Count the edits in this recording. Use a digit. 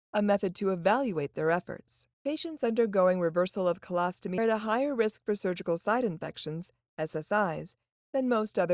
2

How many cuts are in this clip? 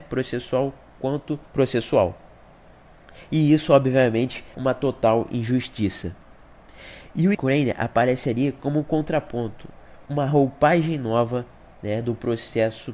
4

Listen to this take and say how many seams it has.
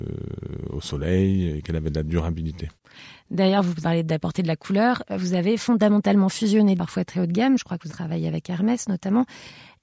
3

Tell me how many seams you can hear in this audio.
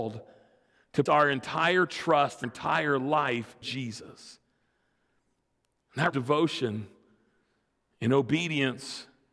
4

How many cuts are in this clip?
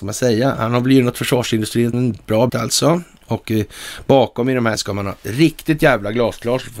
3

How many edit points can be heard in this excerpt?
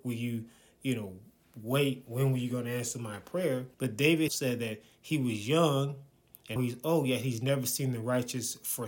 3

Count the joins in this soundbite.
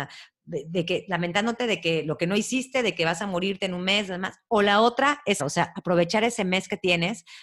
1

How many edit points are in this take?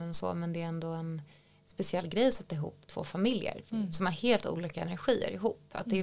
0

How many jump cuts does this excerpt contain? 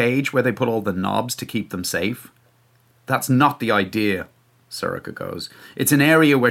0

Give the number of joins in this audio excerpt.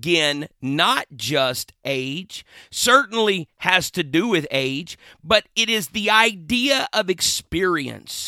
0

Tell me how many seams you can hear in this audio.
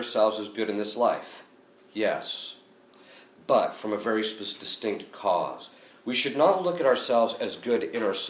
0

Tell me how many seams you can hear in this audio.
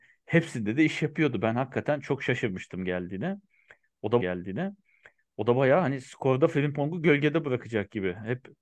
1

